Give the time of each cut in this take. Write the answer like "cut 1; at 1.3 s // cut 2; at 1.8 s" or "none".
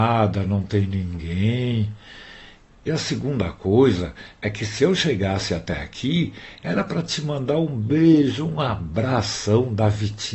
none